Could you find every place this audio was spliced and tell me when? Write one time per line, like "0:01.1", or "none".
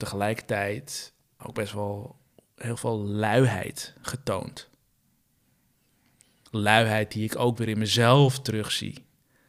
0:01.4